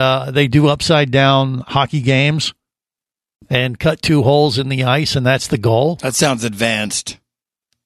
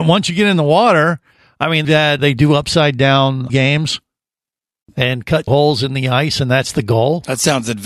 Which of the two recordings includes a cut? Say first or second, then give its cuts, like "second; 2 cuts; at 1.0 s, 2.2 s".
second; 4 cuts; at 1.8 s, 2.2 s, 3.5 s, 5.5 s